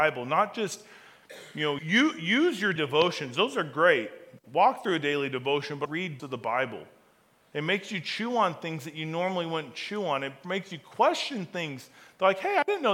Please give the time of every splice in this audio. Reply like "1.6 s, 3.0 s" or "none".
1.8 s, 2.8 s, 5.9 s, 6.2 s